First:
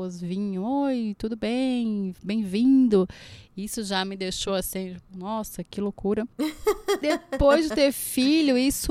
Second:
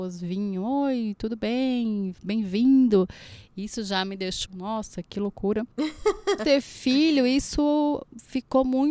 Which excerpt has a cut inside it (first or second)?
second